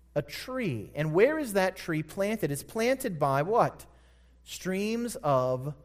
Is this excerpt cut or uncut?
uncut